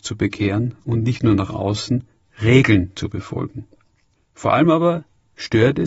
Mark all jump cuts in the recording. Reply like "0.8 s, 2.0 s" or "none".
none